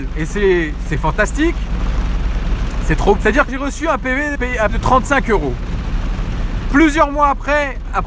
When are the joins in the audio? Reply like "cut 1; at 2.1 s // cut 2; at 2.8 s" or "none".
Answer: cut 1; at 3.2 s // cut 2; at 3.5 s // cut 3; at 4.4 s // cut 4; at 4.7 s

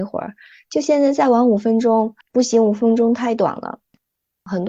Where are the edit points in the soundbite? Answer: cut 1; at 2.2 s

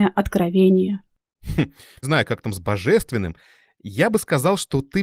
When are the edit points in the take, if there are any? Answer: cut 1; at 2.0 s

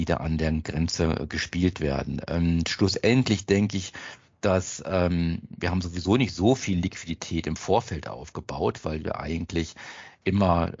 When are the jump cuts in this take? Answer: none

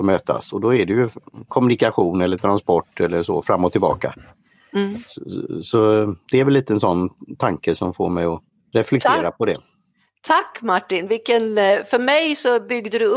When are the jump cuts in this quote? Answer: none

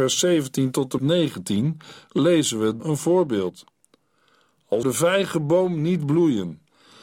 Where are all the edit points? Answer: cut 1; at 1.0 s // cut 2; at 2.8 s // cut 3; at 4.8 s

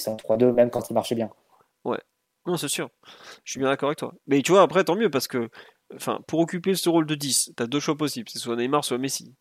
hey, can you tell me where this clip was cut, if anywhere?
none

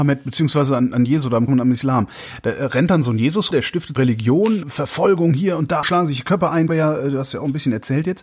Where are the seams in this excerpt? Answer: cut 1; at 1.5 s // cut 2; at 3.5 s // cut 3; at 4.0 s // cut 4; at 4.6 s // cut 5; at 5.8 s // cut 6; at 6.7 s

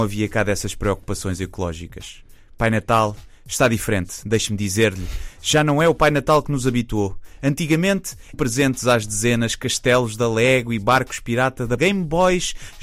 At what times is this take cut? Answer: cut 1; at 8.3 s // cut 2; at 11.8 s

